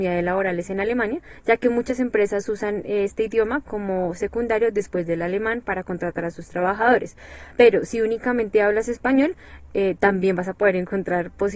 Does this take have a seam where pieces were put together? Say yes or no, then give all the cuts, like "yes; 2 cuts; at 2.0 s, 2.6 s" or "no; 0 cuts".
yes; 1 cut; at 7.5 s